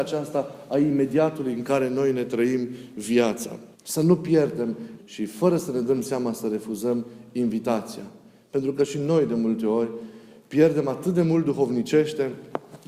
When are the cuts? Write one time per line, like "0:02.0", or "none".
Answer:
0:03.7
0:05.0